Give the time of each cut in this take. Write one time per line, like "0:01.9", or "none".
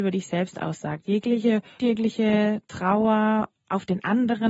0:01.8